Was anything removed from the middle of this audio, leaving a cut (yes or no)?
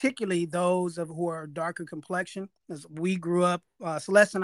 yes